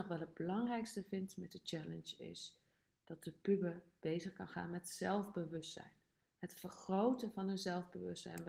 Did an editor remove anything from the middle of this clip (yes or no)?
no